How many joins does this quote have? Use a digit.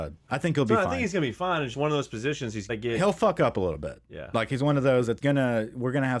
3